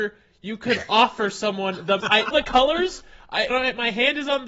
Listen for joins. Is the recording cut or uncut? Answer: cut